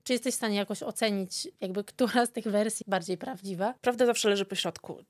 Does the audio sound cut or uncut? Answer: cut